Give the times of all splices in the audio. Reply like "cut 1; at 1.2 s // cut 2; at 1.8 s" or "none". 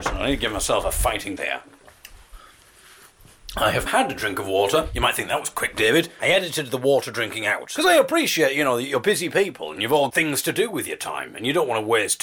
cut 1; at 1.4 s // cut 2; at 3.9 s // cut 3; at 10.1 s